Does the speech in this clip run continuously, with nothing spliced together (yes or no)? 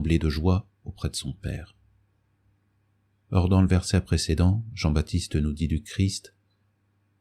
yes